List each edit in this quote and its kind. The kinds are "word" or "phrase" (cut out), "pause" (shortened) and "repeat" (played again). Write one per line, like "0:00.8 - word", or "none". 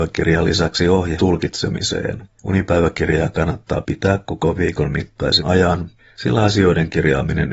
0:01.2 - word
0:02.2 - word
0:04.6 - word
0:05.4 - word